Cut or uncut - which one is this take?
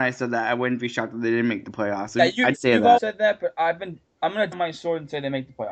cut